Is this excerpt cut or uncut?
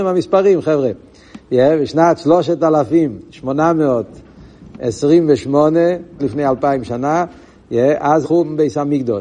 cut